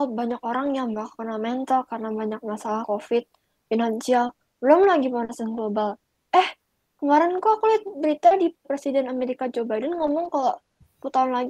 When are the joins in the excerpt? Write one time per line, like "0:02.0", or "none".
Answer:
0:08.6